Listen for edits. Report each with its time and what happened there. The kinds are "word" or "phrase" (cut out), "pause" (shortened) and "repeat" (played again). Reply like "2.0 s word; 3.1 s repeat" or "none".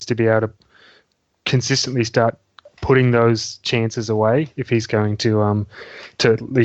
none